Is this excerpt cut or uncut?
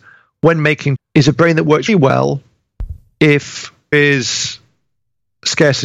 cut